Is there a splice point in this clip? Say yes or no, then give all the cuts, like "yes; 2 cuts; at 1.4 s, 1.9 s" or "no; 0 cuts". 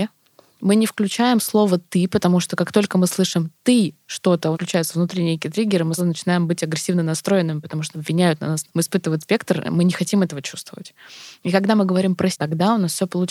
yes; 6 cuts; at 4.5 s, 6.0 s, 7.9 s, 8.7 s, 9.2 s, 12.3 s